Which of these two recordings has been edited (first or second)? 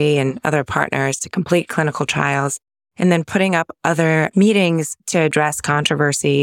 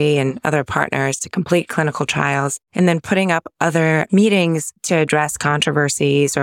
second